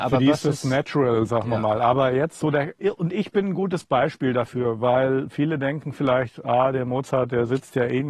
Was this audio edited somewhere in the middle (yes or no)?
no